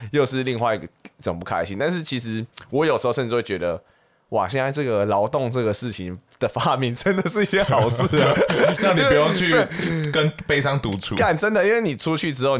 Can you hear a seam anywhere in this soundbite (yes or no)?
no